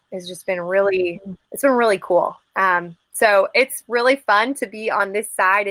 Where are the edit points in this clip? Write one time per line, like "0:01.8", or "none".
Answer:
0:01.4
0:03.0